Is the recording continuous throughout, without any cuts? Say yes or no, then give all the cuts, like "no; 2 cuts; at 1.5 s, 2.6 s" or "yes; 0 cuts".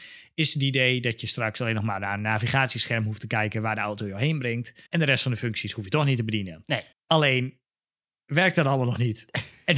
no; 2 cuts; at 4.9 s, 6.9 s